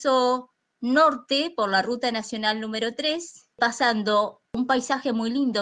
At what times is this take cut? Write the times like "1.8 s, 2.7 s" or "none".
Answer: none